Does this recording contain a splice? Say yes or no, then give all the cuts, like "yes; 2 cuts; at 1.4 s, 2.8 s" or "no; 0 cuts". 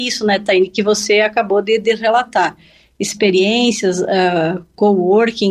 no; 0 cuts